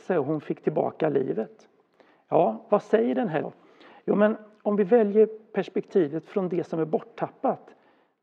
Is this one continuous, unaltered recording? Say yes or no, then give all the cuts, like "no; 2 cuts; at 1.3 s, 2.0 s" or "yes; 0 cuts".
no; 1 cut; at 3.4 s